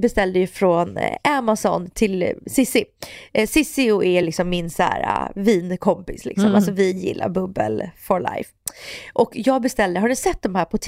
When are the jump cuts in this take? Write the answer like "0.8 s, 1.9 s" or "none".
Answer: none